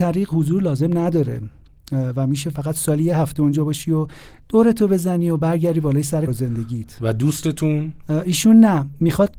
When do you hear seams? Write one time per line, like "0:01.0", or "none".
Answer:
0:06.3